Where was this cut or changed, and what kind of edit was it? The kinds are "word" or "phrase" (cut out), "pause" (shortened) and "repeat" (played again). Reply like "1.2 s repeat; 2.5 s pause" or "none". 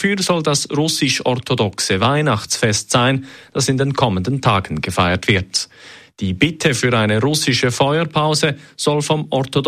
none